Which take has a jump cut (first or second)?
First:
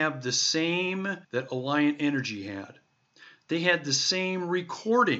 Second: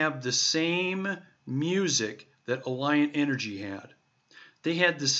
first